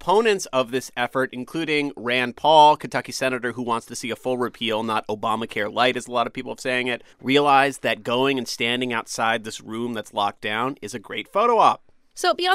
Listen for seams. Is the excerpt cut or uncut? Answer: cut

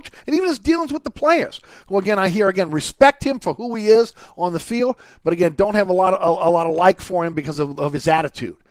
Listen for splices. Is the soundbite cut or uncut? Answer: uncut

